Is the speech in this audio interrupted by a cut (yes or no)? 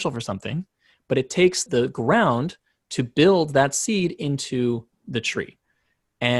yes